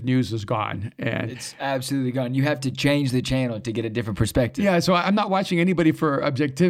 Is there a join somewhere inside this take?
no; 0 cuts

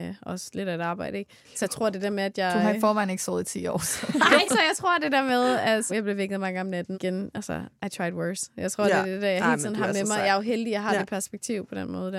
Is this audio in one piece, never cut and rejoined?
no; 4 cuts; at 4.5 s, 5.9 s, 6.9 s, 7.8 s

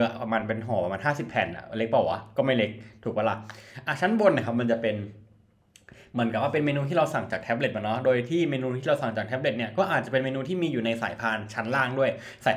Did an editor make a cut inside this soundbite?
no; 0 cuts

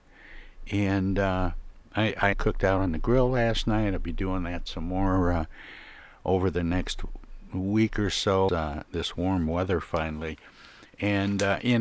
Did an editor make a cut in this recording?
yes; 2 cuts; at 2.3 s, 8.5 s

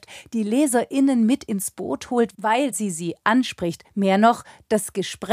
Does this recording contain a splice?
no; 0 cuts

